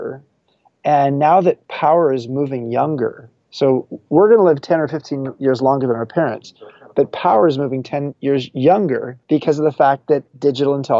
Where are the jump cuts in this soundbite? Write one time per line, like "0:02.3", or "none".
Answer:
0:09.2